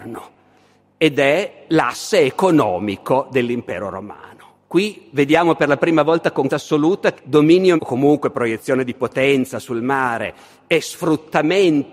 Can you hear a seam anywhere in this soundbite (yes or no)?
yes